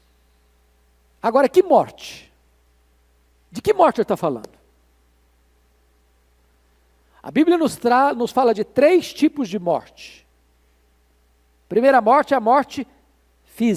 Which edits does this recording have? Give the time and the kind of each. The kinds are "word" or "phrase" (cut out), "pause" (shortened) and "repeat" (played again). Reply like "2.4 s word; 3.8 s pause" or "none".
none